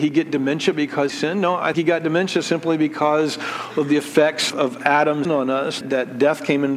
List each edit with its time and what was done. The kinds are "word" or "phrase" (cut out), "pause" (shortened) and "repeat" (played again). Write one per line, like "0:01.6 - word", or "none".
0:01.1 - word
0:01.7 - word
0:04.5 - word
0:05.2 - word
0:05.8 - word